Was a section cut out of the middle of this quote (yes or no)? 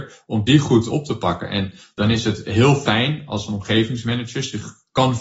no